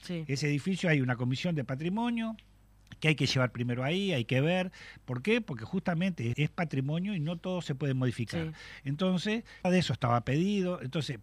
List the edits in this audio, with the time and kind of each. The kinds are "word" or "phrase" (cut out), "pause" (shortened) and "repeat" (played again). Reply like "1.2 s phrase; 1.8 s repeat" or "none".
6.3 s word; 9.6 s word